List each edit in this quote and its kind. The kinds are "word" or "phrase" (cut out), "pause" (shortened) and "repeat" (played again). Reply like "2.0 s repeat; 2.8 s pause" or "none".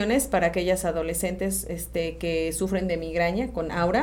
none